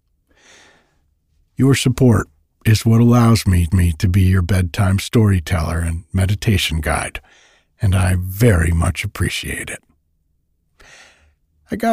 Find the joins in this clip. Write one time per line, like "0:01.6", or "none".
0:03.7